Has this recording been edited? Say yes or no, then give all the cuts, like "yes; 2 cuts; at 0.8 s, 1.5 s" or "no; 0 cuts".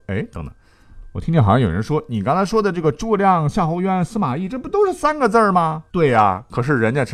yes; 1 cut; at 5.9 s